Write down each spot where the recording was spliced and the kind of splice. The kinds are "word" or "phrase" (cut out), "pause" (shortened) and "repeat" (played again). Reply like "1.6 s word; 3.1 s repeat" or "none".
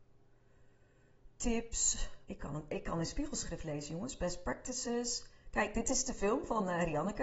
2.2 s pause